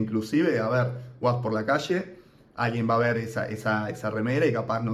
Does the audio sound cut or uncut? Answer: uncut